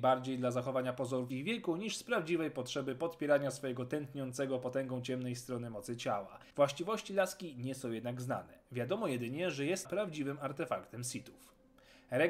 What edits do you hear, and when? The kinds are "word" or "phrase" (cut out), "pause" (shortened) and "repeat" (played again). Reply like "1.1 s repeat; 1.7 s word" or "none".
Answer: 1.3 s word; 6.5 s pause; 9.8 s word